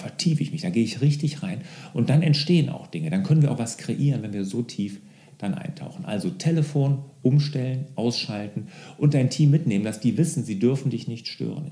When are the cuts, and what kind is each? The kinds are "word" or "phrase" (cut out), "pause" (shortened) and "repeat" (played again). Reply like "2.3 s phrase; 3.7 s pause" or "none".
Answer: none